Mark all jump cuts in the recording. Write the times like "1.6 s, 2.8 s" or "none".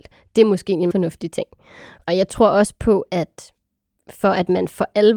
0.9 s